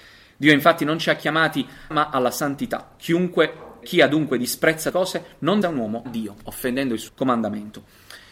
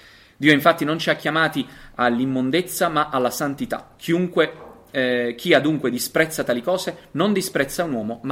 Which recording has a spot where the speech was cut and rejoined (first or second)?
first